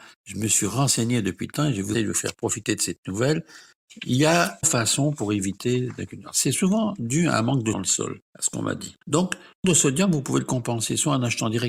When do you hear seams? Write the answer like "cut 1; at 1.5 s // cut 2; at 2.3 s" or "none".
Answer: cut 1; at 1.9 s // cut 2; at 4.6 s // cut 3; at 7.7 s // cut 4; at 8.2 s // cut 5; at 9.0 s // cut 6; at 9.6 s